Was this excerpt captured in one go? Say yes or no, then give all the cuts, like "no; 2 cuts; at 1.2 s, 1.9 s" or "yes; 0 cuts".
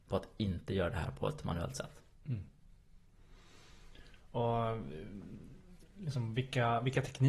yes; 0 cuts